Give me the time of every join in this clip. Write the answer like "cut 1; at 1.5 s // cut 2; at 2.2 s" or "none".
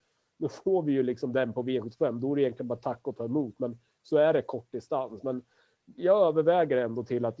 none